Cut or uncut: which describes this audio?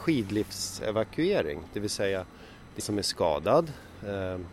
cut